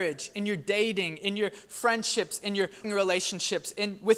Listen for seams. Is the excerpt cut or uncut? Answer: cut